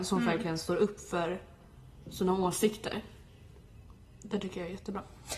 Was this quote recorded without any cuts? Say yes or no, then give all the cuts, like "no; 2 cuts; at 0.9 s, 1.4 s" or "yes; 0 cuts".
yes; 0 cuts